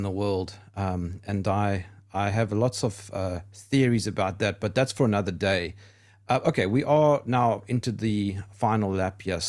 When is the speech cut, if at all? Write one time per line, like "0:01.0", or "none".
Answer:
none